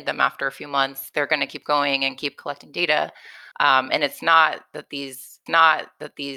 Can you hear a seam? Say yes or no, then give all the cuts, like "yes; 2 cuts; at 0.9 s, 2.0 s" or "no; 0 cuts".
yes; 2 cuts; at 3.5 s, 5.5 s